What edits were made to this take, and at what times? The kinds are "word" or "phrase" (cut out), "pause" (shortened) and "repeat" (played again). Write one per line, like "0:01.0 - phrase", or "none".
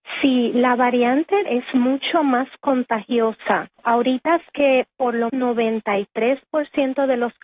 0:01.5 - word
0:04.5 - word
0:05.3 - word